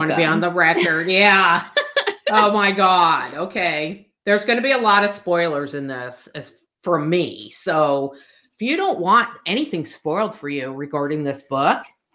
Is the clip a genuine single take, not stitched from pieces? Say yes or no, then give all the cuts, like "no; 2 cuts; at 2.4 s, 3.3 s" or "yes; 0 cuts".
yes; 0 cuts